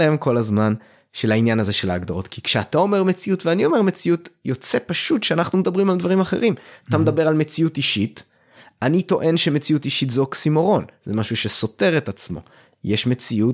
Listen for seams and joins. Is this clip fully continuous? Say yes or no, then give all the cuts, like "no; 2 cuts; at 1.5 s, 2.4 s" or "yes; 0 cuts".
yes; 0 cuts